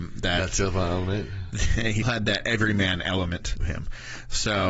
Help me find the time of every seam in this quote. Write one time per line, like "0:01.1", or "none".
0:02.0
0:03.6